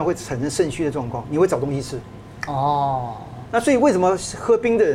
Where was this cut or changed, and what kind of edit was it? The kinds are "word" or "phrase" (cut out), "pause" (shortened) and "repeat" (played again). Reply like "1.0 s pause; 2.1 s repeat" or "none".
3.4 s word